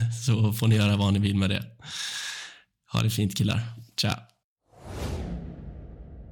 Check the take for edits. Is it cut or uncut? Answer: uncut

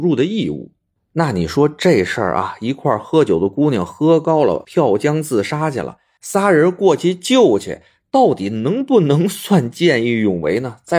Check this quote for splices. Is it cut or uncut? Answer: uncut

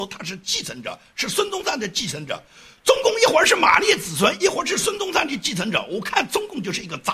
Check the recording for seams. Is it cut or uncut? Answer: uncut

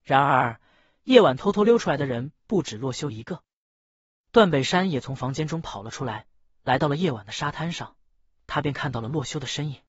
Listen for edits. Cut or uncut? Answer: uncut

